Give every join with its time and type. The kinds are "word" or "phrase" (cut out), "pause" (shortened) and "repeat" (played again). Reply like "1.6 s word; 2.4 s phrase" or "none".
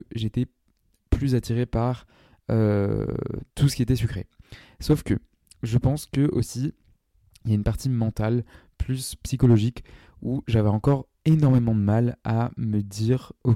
3.5 s pause